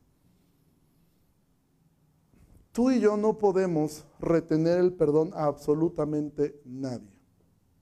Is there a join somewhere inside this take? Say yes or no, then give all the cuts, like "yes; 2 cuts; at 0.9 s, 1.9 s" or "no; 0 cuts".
no; 0 cuts